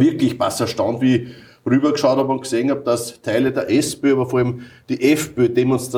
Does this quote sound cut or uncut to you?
uncut